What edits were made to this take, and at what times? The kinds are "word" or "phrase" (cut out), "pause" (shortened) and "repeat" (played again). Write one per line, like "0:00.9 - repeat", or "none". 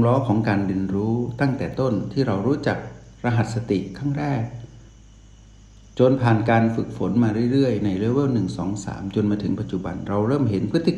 none

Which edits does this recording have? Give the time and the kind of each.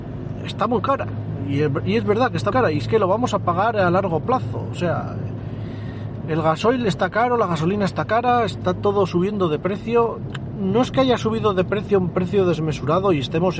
0:02.5 - word

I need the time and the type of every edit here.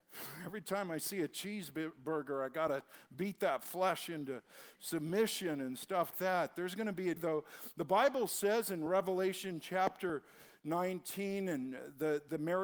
0:06.1 - word
0:07.2 - word

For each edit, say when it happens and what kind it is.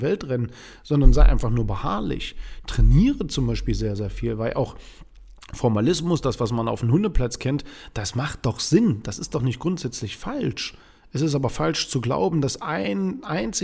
none

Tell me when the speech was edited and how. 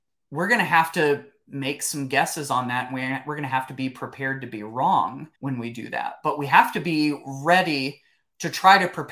0:05.4 - pause

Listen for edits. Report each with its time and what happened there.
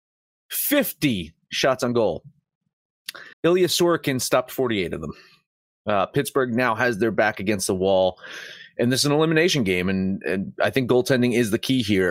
0:03.3 - pause

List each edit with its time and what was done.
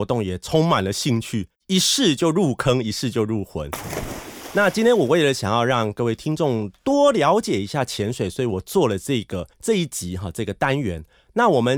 0:01.6 - pause
0:09.5 - pause

